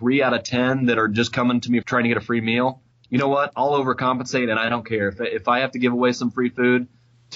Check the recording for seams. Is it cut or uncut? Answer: cut